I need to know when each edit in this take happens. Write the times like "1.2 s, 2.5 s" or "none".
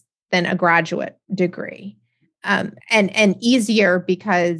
1.2 s, 2.8 s